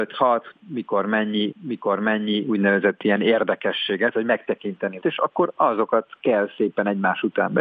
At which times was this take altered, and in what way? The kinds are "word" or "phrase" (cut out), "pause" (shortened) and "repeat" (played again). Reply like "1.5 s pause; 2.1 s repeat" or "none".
1.5 s repeat; 5.0 s word